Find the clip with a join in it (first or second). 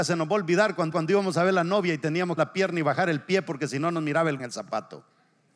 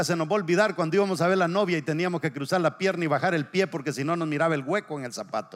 first